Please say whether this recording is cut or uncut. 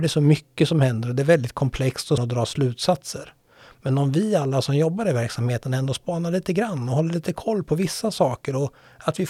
cut